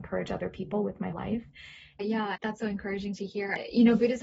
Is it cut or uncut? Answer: cut